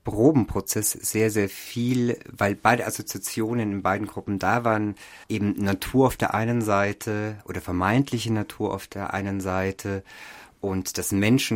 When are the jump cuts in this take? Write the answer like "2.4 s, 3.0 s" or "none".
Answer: 5.2 s